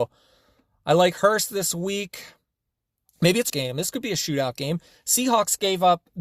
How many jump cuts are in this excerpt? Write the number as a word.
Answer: one